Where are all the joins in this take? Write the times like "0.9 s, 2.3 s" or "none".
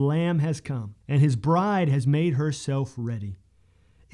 1.0 s